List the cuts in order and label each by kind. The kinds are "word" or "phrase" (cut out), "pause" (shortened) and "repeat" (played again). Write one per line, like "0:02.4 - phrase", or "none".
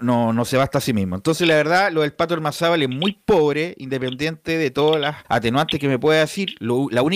0:05.2 - pause